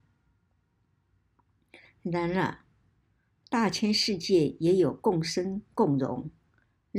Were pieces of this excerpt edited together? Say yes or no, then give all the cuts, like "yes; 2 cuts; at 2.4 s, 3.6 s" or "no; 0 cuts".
no; 0 cuts